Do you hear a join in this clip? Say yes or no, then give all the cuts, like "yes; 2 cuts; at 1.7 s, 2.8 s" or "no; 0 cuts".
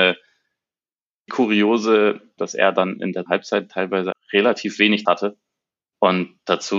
yes; 5 cuts; at 1.3 s, 2.4 s, 3.3 s, 4.1 s, 5.0 s